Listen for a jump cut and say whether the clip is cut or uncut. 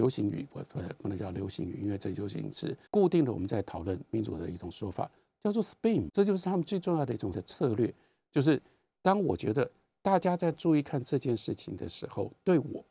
cut